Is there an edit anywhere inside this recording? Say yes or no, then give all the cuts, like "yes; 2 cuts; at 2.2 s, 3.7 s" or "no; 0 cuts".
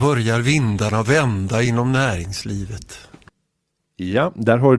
no; 0 cuts